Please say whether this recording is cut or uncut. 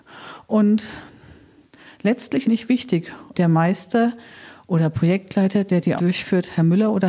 cut